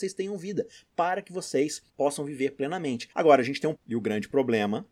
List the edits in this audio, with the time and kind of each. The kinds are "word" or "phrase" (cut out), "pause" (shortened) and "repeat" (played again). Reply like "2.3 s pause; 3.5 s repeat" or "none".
1.9 s pause; 3.1 s pause; 3.7 s word